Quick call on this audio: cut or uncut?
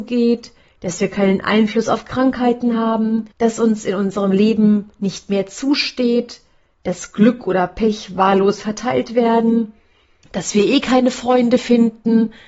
cut